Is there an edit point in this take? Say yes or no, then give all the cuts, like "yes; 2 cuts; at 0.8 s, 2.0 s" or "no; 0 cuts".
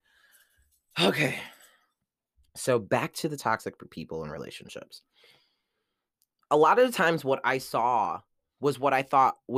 no; 0 cuts